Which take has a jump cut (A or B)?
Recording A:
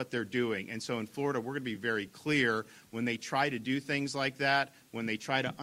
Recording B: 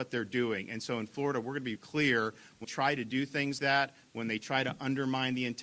B